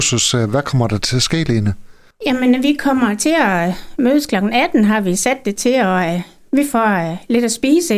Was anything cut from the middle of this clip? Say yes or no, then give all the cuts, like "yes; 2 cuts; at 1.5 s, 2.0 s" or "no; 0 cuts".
no; 0 cuts